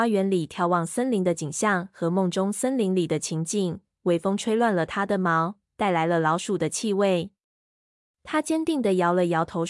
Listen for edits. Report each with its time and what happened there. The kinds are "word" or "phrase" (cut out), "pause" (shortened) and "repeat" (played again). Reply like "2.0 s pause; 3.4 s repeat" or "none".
none